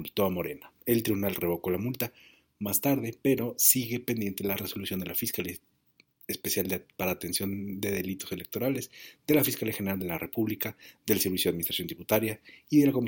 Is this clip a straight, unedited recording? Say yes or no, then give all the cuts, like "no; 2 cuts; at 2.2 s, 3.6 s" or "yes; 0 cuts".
yes; 0 cuts